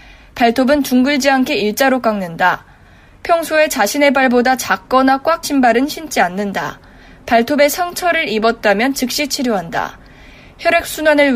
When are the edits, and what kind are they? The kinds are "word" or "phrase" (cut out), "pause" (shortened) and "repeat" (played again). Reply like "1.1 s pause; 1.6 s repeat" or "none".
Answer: 5.4 s word